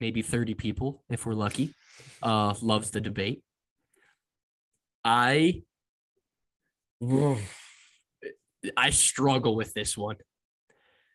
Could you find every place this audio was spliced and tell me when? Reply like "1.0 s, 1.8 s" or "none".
none